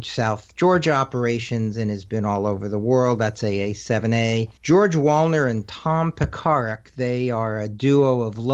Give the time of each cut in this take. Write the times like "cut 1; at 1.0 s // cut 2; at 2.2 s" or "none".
cut 1; at 4.6 s